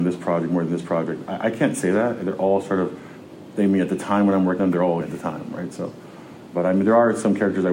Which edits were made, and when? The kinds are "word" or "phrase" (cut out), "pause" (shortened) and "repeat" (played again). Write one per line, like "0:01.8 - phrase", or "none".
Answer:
0:04.6 - word
0:05.0 - word